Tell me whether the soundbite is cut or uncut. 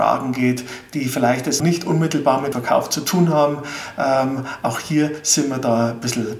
cut